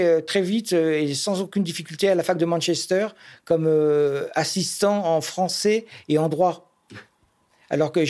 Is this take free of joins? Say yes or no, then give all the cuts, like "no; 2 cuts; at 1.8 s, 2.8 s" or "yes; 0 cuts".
yes; 0 cuts